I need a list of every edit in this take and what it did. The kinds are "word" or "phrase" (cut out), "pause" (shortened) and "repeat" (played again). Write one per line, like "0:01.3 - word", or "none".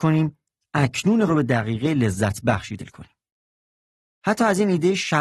0:01.3 - word
0:02.8 - word